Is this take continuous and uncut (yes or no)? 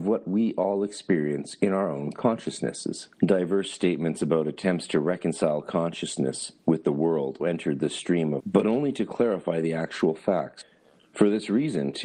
no